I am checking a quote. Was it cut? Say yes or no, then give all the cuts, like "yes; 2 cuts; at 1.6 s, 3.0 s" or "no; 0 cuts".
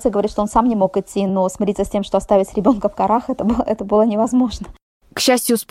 no; 0 cuts